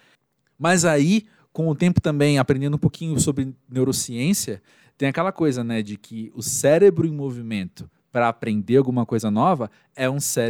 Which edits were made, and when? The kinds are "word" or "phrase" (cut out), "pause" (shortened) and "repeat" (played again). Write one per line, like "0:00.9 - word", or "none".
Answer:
none